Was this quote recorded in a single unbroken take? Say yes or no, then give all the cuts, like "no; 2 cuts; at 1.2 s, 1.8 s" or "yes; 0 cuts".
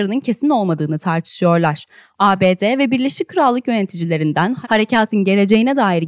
yes; 0 cuts